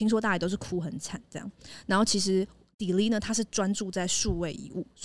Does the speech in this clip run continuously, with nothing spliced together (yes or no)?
yes